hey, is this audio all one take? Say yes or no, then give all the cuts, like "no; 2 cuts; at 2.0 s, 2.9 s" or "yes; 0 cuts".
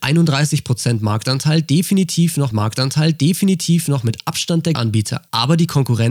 no; 2 cuts; at 2.5 s, 4.7 s